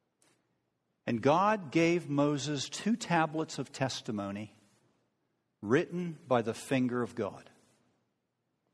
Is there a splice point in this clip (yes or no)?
no